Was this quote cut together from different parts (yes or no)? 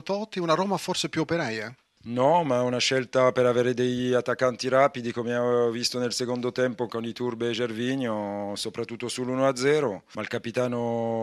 yes